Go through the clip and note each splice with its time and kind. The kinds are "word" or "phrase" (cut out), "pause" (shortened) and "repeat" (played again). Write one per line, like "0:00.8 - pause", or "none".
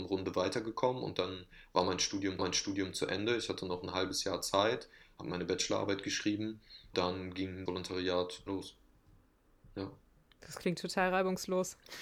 0:02.4 - repeat
0:06.9 - word
0:07.7 - word
0:08.5 - word